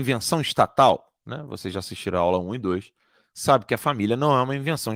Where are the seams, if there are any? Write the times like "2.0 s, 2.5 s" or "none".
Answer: none